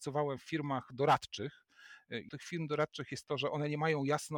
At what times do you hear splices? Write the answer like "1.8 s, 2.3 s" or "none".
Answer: 2.3 s